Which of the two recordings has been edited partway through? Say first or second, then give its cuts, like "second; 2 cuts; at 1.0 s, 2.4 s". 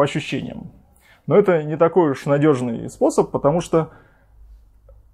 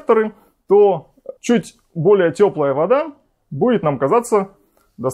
second; 1 cut; at 1.4 s